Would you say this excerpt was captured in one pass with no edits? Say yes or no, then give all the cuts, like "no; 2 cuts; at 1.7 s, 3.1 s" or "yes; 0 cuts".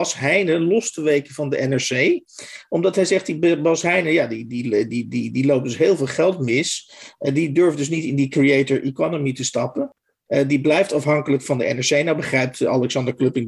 yes; 0 cuts